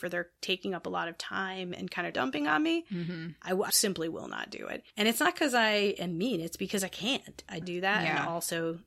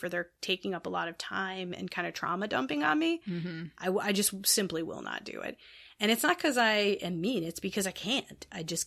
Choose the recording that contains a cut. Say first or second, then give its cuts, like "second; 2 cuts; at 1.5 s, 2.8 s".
first; 4 cuts; at 2.1 s, 3.7 s, 4.9 s, 7.6 s